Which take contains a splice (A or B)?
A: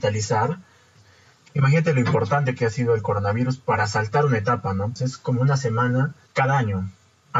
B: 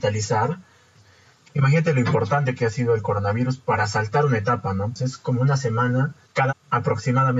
B